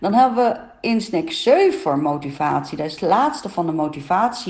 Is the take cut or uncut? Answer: uncut